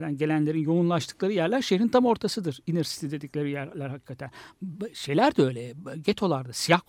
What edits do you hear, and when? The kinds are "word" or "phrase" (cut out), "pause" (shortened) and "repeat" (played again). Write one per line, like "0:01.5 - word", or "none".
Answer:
none